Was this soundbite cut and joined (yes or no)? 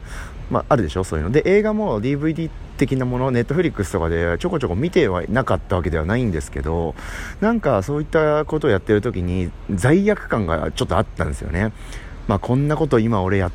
no